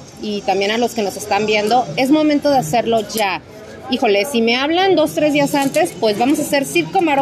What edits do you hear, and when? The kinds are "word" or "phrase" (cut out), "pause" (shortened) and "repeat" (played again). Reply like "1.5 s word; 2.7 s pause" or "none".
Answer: none